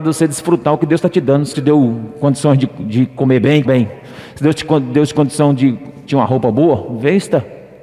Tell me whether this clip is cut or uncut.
cut